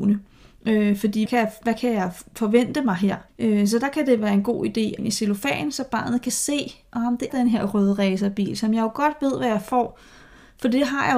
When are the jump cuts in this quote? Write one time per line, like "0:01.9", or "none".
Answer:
0:01.3
0:03.3
0:05.0
0:07.3